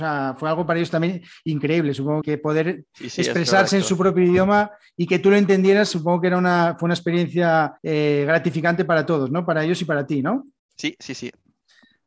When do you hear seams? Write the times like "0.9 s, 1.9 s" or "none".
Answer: 2.2 s, 7.8 s, 10.6 s